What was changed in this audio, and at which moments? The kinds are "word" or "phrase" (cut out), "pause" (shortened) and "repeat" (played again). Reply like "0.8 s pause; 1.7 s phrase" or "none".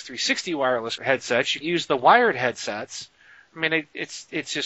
1.0 s phrase; 1.6 s word